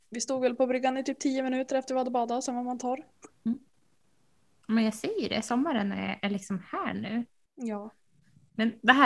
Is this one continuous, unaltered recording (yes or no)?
yes